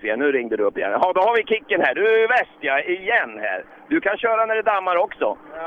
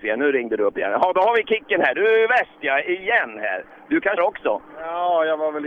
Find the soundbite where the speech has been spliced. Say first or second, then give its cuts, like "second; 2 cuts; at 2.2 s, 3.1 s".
second; 1 cut; at 4.2 s